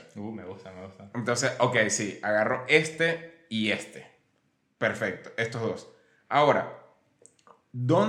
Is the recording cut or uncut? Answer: uncut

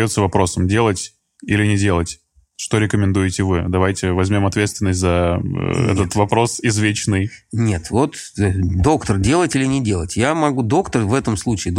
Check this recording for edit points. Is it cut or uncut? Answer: uncut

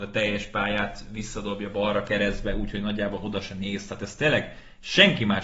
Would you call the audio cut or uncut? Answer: uncut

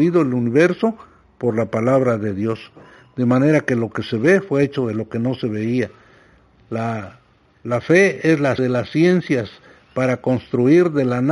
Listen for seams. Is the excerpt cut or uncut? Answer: cut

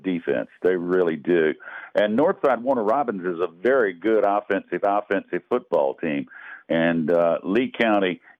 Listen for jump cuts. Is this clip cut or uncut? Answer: cut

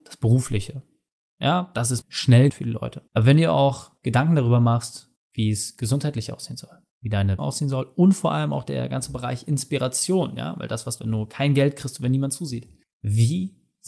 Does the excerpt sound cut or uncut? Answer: cut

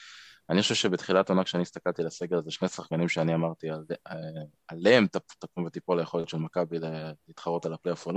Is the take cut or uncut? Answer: uncut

